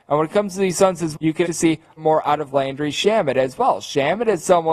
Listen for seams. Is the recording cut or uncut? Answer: cut